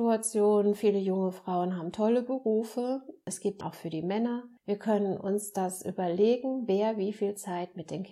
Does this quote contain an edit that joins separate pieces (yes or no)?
yes